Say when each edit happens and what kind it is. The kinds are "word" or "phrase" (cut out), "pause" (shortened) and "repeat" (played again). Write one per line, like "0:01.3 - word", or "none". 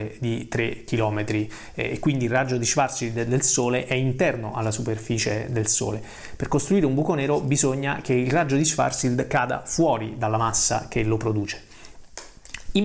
none